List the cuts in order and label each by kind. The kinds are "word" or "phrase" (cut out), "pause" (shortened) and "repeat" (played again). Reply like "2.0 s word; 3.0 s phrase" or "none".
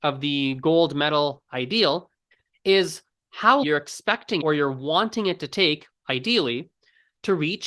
2.3 s pause; 3.6 s word; 4.4 s word